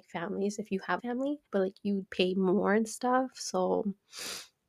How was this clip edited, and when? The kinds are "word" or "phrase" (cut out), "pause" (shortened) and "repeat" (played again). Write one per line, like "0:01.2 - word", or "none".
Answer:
0:01.0 - word
0:01.5 - pause
0:02.1 - word